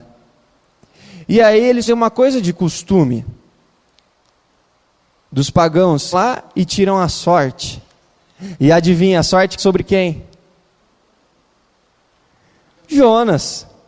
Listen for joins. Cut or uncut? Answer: cut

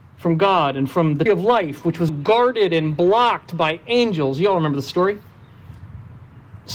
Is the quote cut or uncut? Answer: cut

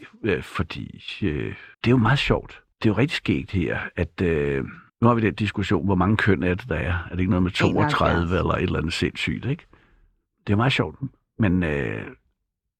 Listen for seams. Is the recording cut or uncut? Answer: cut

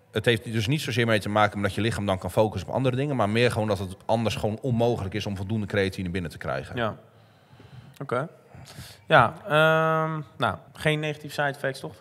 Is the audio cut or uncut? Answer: cut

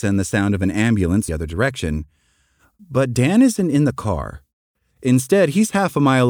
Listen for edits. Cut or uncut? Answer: cut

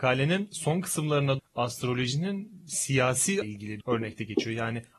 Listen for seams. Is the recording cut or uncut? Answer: cut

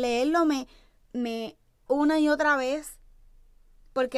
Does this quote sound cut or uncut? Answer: cut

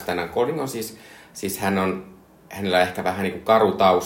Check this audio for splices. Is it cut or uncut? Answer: uncut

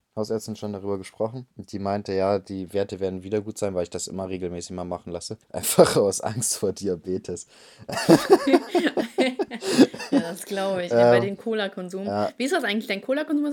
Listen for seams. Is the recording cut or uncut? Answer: cut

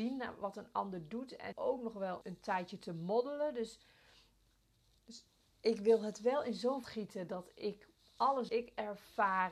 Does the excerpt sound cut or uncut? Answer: cut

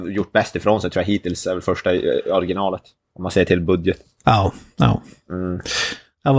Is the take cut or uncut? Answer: uncut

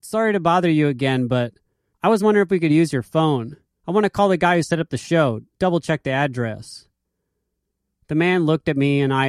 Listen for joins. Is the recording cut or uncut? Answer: uncut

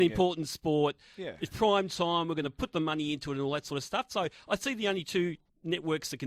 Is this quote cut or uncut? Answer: uncut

